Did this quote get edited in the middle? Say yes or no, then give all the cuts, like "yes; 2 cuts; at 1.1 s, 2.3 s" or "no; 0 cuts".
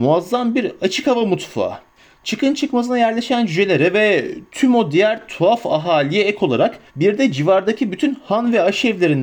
yes; 2 cuts; at 2.0 s, 6.9 s